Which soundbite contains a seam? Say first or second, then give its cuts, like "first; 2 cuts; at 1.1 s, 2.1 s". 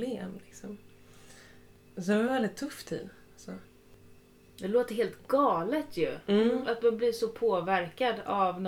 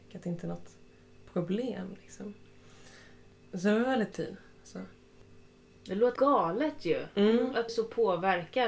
second; 3 cuts; at 4.1 s, 6.2 s, 7.7 s